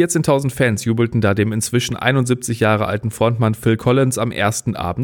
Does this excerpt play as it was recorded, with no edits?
yes; 0 cuts

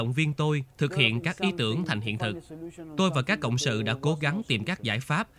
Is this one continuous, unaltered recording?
yes; 0 cuts

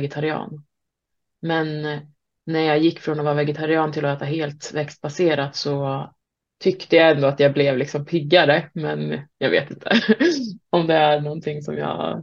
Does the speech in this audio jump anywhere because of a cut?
yes; 2 cuts; at 6.2 s, 9.3 s

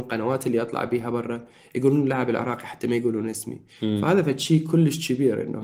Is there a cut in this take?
no; 0 cuts

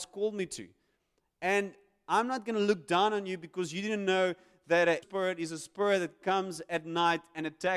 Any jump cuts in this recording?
yes; 1 cut; at 5.0 s

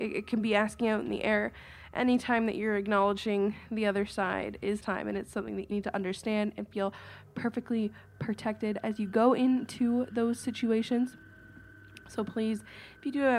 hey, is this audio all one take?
no; 2 cuts; at 4.8 s, 5.7 s

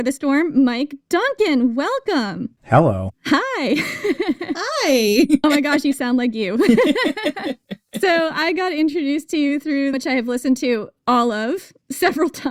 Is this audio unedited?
no; 1 cut; at 9.9 s

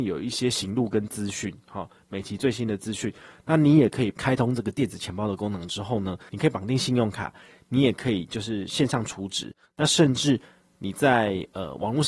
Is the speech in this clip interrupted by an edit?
no; 0 cuts

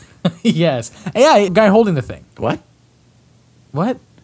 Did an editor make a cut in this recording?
yes; 2 cuts; at 1.5 s, 2.3 s

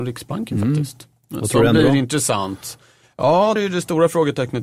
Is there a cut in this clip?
yes; 2 cuts; at 1.4 s, 3.6 s

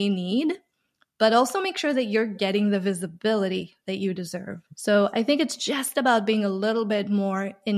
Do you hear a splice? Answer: yes; 1 cut; at 4.7 s

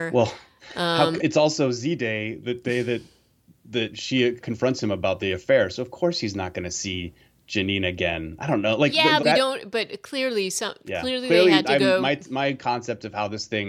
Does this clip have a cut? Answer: yes; 5 cuts; at 1.2 s, 4.4 s, 5.2 s, 9.2 s, 10.8 s

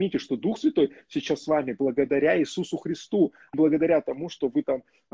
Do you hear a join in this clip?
yes; 1 cut; at 3.5 s

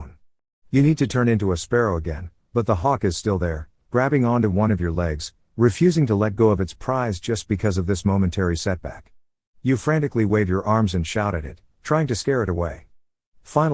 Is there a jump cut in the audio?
no; 0 cuts

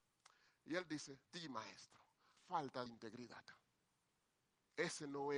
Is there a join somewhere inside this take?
yes; 3 cuts; at 1.3 s, 2.4 s, 2.9 s

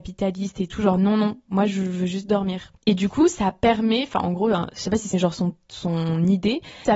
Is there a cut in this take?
yes; 2 cuts; at 2.8 s, 5.1 s

